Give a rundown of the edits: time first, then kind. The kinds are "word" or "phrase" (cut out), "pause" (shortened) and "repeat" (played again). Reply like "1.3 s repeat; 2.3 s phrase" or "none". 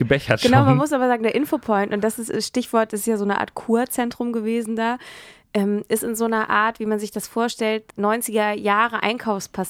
7.9 s pause

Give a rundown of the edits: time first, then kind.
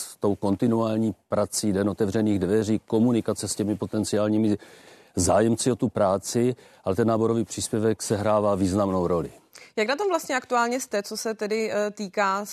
none

